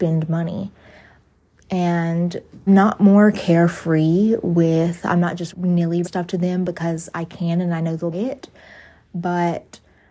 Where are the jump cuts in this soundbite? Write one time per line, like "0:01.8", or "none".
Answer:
0:02.7
0:05.5
0:06.0
0:08.1